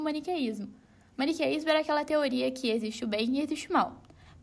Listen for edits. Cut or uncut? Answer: uncut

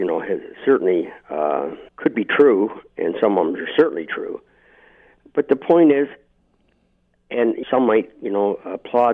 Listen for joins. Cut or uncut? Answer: cut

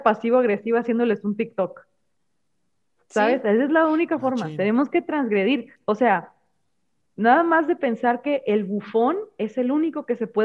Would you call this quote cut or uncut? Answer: uncut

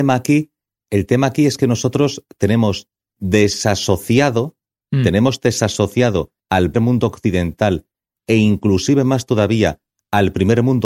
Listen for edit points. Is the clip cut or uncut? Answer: cut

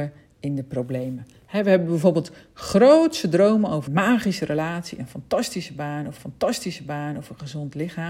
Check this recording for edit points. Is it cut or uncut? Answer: cut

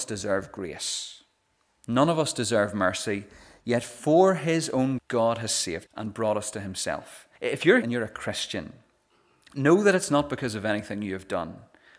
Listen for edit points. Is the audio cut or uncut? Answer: cut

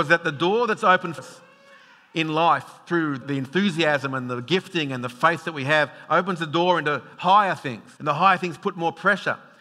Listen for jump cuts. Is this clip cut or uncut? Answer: cut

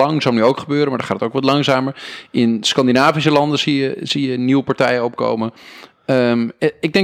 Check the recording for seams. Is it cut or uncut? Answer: uncut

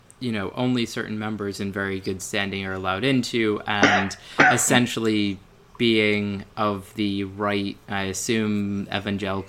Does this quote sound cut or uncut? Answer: uncut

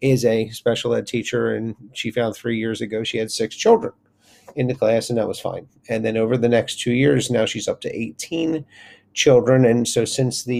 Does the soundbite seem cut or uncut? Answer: uncut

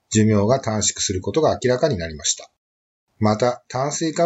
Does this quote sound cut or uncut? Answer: uncut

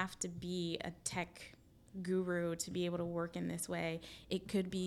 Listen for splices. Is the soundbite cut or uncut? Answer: uncut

